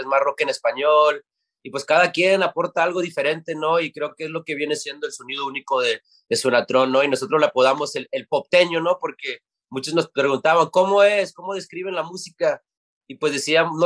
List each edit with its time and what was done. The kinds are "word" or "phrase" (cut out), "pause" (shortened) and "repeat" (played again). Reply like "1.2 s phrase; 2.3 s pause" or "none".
none